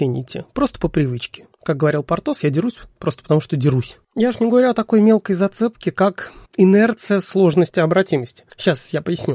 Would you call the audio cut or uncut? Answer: cut